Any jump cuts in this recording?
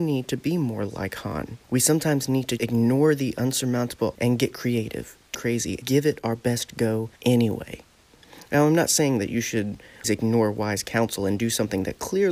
yes; 7 cuts; at 1.6 s, 2.6 s, 4.2 s, 5.3 s, 5.8 s, 7.2 s, 10.0 s

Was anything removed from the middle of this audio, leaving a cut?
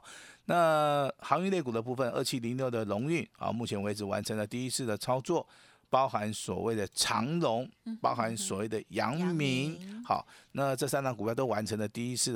no; 0 cuts

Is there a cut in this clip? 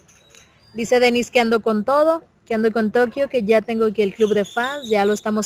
no; 0 cuts

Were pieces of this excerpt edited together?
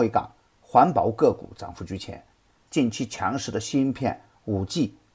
yes; 1 cut; at 2.7 s

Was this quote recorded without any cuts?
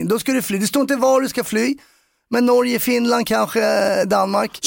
yes; 0 cuts

